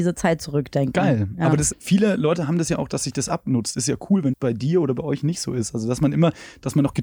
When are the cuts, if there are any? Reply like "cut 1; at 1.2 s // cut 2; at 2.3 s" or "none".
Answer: cut 1; at 1.7 s // cut 2; at 4.3 s